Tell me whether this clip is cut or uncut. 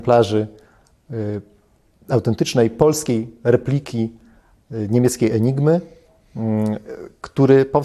uncut